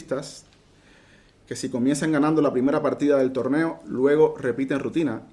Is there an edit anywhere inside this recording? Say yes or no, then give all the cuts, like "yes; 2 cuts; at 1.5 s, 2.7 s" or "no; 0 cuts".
no; 0 cuts